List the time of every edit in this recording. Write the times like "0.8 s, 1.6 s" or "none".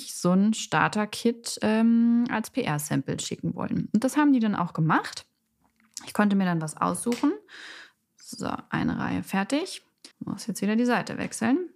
10.1 s